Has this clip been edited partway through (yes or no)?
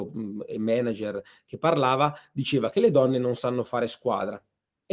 no